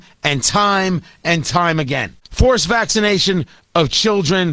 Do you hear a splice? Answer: yes; 1 cut; at 2.2 s

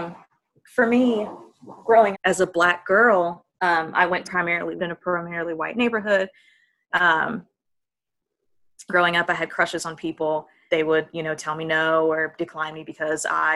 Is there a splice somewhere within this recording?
yes; 7 cuts; at 2.1 s, 3.5 s, 4.2 s, 4.8 s, 6.9 s, 8.9 s, 10.7 s

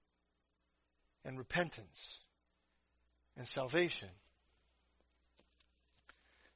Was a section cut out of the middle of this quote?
no; 0 cuts

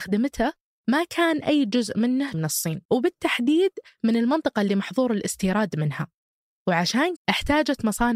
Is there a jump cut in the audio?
yes; 3 cuts; at 2.3 s, 2.9 s, 7.2 s

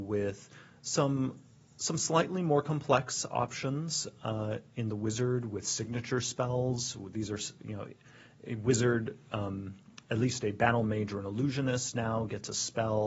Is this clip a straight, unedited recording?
yes; 0 cuts

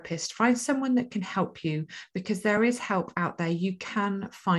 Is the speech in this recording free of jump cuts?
yes; 0 cuts

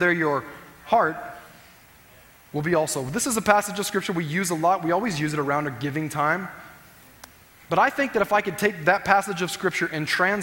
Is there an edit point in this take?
no; 0 cuts

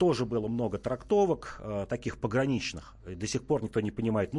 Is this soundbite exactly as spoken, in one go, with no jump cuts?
yes; 0 cuts

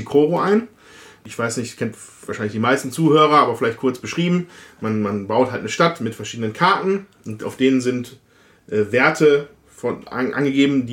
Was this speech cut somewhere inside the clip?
no; 0 cuts

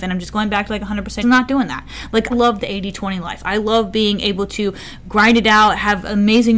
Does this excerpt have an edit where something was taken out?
yes; 2 cuts; at 1.2 s, 2.3 s

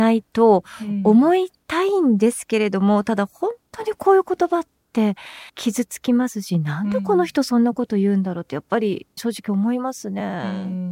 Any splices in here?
yes; 2 cuts; at 5.5 s, 9.2 s

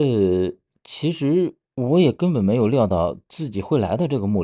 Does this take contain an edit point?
no; 0 cuts

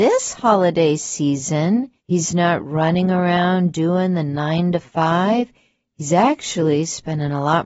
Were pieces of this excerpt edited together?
yes; 1 cut; at 2.0 s

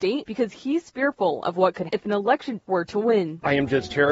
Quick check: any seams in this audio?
yes; 2 cuts; at 1.9 s, 2.6 s

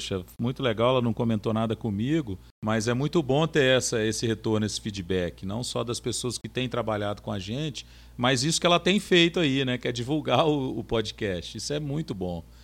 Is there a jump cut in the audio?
no; 0 cuts

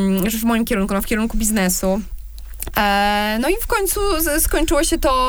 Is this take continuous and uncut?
yes; 0 cuts

